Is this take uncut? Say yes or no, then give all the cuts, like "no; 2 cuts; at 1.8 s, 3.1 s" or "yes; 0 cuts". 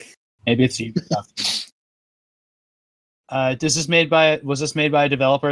no; 1 cut; at 1.7 s